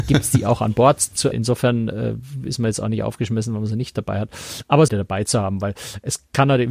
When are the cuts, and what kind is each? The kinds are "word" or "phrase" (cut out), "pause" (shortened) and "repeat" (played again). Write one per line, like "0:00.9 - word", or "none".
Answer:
0:01.3 - word
0:04.9 - phrase